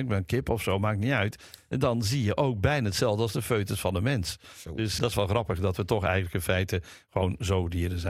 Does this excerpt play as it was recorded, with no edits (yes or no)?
no